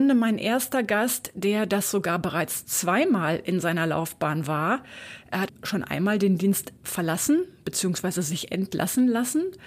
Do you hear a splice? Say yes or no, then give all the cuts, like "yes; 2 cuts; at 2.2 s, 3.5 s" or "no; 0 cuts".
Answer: yes; 2 cuts; at 5.5 s, 6.8 s